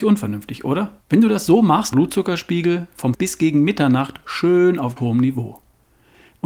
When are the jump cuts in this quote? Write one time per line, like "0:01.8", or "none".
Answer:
0:01.0
0:01.9
0:03.1
0:05.0

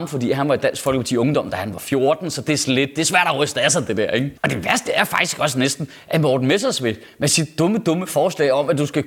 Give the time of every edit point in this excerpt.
0:04.4

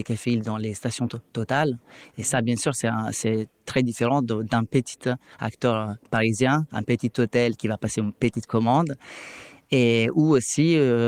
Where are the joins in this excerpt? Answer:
0:04.4

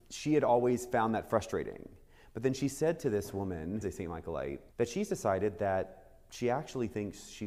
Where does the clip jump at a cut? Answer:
0:03.8
0:04.7

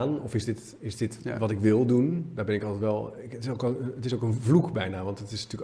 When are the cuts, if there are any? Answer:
none

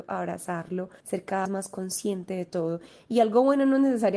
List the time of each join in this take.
0:01.0
0:01.4

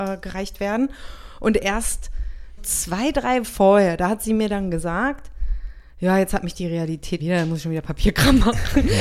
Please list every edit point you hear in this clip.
0:02.6
0:03.4
0:07.2

